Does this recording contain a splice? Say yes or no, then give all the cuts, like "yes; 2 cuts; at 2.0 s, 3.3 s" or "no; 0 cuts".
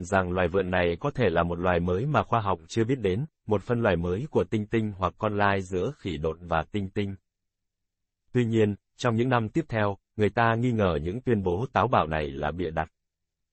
no; 0 cuts